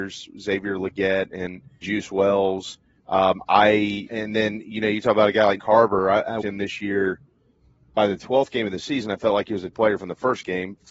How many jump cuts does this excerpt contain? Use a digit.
5